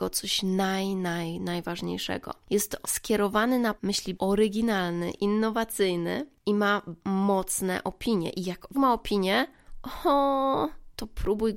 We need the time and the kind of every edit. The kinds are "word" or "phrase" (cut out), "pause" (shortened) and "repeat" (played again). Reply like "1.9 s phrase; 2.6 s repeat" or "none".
2.8 s word; 3.8 s word; 4.1 s phrase; 7.0 s word; 8.7 s word